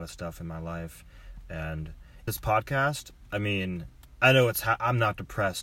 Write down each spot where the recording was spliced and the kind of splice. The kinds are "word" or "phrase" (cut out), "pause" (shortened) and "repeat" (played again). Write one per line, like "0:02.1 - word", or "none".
0:02.3 - word